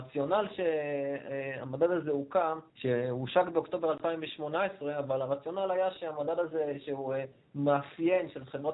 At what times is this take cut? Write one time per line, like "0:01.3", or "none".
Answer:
0:02.7